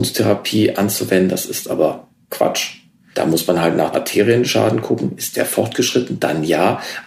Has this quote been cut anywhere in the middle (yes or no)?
yes